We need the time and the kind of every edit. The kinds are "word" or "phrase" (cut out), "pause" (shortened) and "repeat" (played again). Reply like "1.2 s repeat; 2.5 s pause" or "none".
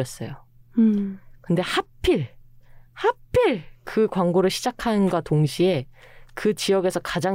none